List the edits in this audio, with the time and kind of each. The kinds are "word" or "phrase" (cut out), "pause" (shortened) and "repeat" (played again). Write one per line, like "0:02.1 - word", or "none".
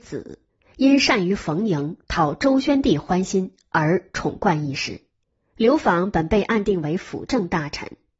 0:05.2 - pause